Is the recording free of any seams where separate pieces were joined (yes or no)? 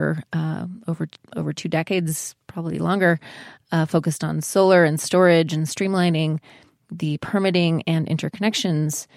yes